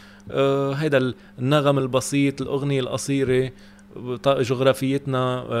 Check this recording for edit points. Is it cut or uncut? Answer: uncut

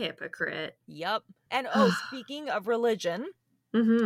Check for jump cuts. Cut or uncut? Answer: uncut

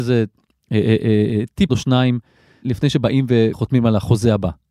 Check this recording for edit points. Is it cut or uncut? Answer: cut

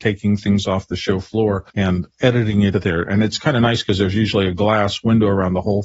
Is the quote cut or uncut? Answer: cut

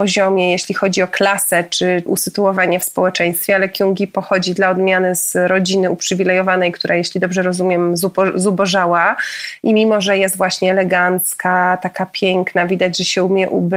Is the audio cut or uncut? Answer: cut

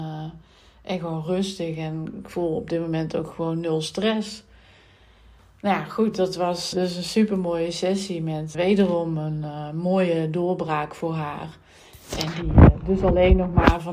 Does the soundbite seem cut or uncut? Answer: cut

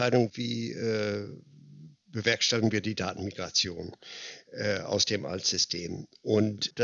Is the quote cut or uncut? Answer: uncut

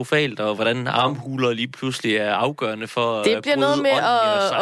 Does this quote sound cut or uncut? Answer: uncut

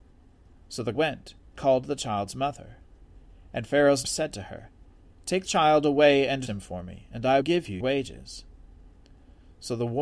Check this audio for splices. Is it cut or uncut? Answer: cut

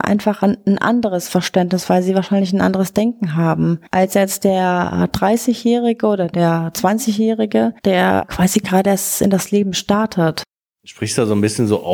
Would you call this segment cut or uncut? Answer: uncut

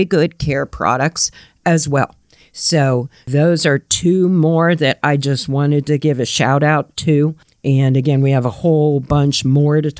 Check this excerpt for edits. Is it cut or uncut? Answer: uncut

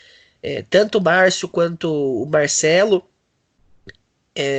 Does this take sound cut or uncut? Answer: uncut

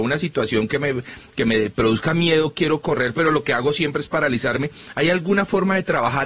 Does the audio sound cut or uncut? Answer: uncut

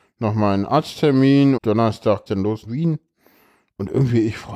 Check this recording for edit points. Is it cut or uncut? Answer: cut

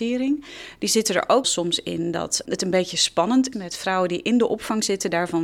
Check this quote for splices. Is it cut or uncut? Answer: cut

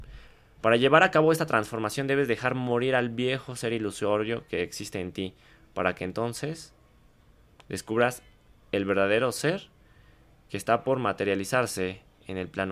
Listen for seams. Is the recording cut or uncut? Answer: uncut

